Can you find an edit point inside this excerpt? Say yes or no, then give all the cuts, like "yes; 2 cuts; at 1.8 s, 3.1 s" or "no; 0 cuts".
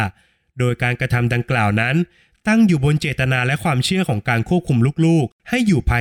no; 0 cuts